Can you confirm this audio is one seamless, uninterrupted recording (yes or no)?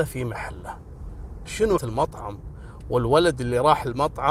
no